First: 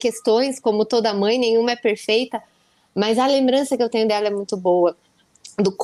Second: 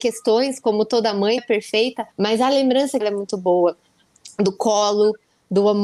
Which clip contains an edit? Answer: second; 3 cuts; at 1.4 s, 2.1 s, 3.0 s

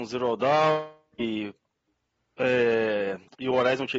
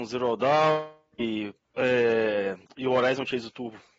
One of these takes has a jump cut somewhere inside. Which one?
second; 1 cut; at 1.6 s

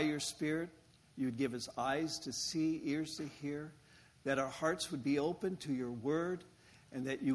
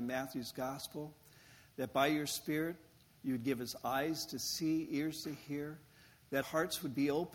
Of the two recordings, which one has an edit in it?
second; 1 cut; at 6.4 s

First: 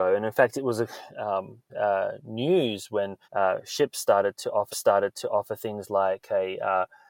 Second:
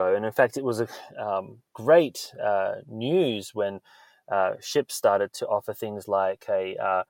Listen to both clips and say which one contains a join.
first; 3 cuts; at 1.7 s, 3.2 s, 4.7 s

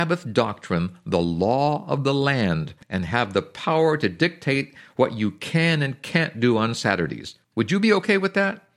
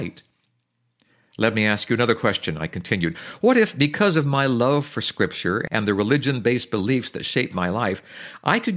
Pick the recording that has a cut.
first; 2 cuts; at 2.8 s, 7.4 s

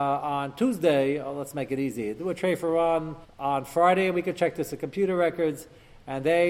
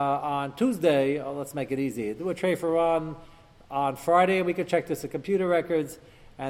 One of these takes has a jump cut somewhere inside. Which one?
first; 1 cut; at 3.2 s

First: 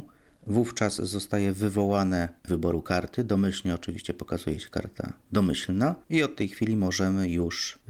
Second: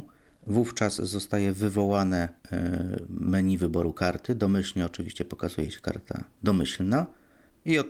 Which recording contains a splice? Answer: first; 2 cuts; at 2.5 s, 6.0 s

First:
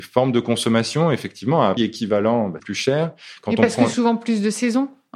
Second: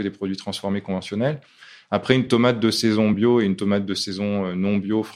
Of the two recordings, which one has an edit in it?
first; 2 cuts; at 1.8 s, 2.6 s

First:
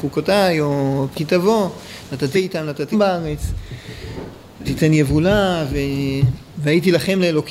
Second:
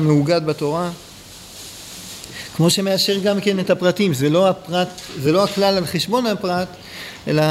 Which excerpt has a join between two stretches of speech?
first; 4 cuts; at 1.1 s, 2.3 s, 2.9 s, 4.6 s

